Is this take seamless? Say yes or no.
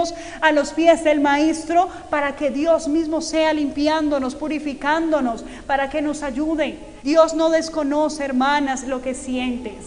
no